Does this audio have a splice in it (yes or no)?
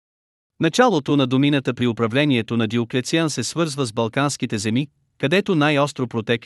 no